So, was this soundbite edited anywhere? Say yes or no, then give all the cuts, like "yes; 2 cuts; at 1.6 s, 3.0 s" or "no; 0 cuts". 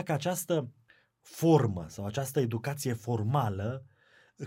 no; 0 cuts